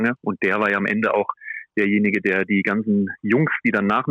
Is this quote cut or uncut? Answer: uncut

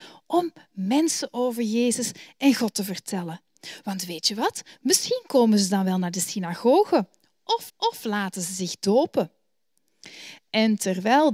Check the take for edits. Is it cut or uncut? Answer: cut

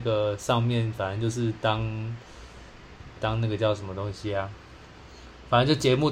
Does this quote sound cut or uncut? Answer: cut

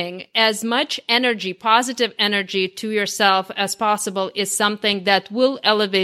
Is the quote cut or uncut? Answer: uncut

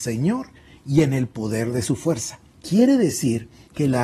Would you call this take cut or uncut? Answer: cut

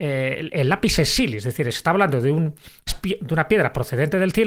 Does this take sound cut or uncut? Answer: cut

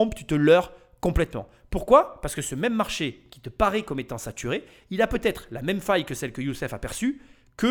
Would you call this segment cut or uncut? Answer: uncut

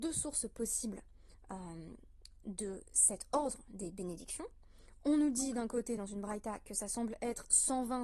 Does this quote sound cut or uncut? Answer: uncut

